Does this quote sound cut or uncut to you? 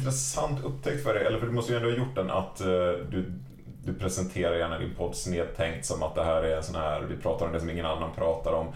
uncut